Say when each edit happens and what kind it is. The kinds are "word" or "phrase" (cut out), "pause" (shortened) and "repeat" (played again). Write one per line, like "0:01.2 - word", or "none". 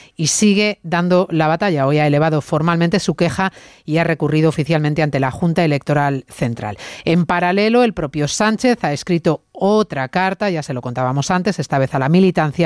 none